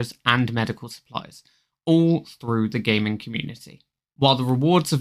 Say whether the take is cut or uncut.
uncut